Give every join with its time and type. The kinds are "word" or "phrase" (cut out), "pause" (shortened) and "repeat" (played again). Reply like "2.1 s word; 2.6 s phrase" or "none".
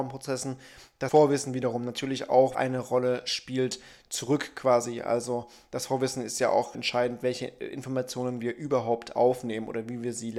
1.1 s word; 2.5 s word; 6.7 s word

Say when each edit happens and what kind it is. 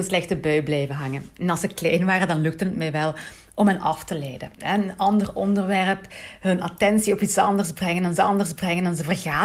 8.2 s repeat

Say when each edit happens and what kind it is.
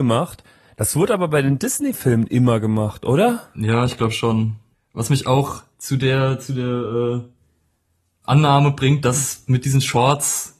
4.7 s pause; 5.7 s pause; 8.2 s word

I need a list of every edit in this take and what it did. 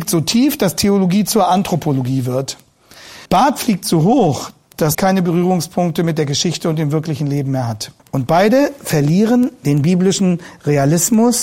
3.3 s pause; 4.9 s phrase; 8.0 s pause

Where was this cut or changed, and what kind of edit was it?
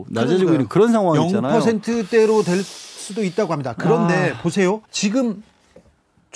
4.8 s pause

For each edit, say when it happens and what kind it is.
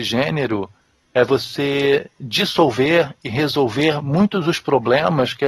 none

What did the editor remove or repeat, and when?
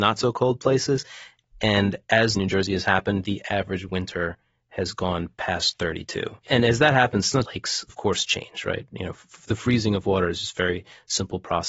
2.4 s phrase; 6.4 s pause; 7.5 s phrase; 7.9 s word

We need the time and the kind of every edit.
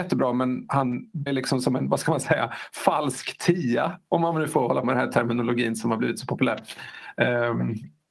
1.3 s word; 4.8 s word

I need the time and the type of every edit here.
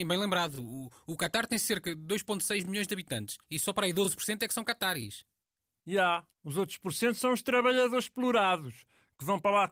3.4 s pause; 6.3 s pause

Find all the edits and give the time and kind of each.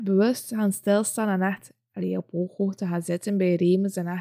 none

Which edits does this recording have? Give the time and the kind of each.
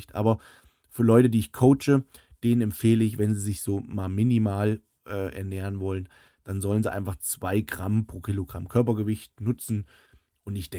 none

